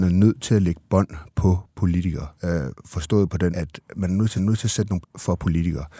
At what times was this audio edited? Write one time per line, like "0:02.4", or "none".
0:02.3
0:03.5
0:03.9
0:04.4
0:05.0